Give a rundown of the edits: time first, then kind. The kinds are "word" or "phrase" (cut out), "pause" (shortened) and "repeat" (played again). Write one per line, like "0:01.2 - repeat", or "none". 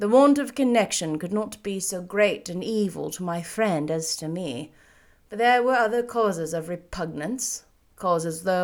none